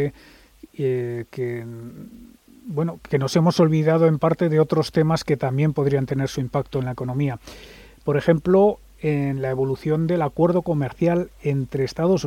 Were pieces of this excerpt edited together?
no; 0 cuts

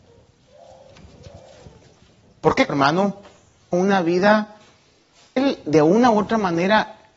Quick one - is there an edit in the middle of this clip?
yes; 3 cuts; at 2.7 s, 3.7 s, 5.4 s

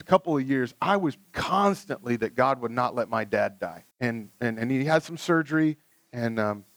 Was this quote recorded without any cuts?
no; 2 cuts; at 1.2 s, 3.9 s

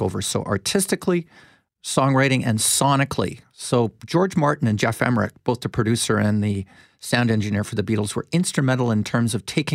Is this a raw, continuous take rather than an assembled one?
yes; 0 cuts

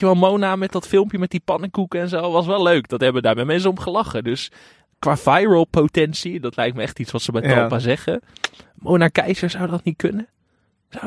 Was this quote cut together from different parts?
no; 0 cuts

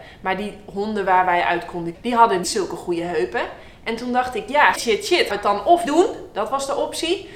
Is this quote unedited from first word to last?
no; 5 cuts; at 1.9 s, 2.4 s, 4.7 s, 5.3 s, 5.9 s

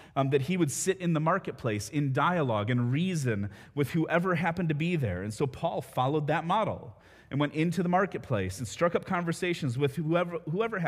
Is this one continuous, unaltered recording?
yes; 0 cuts

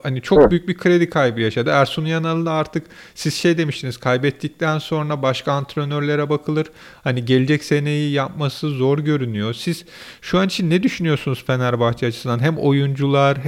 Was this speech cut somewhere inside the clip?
no; 0 cuts

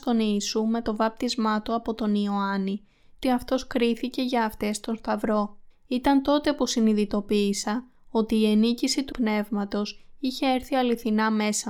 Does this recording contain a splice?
yes; 3 cuts; at 3.2 s, 5.7 s, 9.1 s

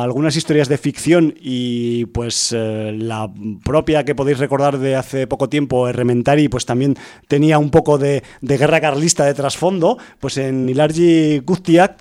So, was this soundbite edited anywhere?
no; 0 cuts

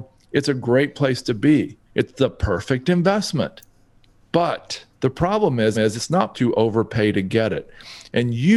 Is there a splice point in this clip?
yes; 4 cuts; at 1.8 s, 4.9 s, 5.7 s, 6.3 s

